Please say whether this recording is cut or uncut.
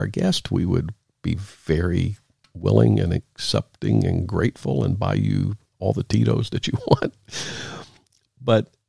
uncut